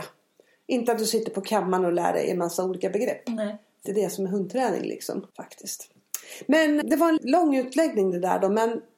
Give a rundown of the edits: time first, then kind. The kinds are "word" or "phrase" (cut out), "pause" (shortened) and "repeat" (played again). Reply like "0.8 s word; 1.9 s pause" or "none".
3.9 s phrase; 5.3 s pause; 6.8 s word; 7.2 s word